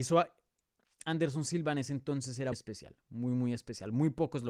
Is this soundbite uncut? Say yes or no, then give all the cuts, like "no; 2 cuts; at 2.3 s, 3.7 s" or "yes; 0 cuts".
no; 1 cut; at 2.5 s